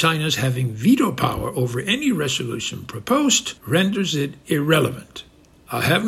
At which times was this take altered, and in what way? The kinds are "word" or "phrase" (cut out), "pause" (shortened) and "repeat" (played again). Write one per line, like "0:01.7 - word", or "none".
0:03.6 - pause